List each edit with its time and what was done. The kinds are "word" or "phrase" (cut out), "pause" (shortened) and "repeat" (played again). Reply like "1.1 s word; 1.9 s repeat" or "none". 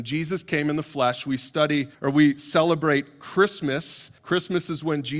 1.9 s pause; 4.2 s pause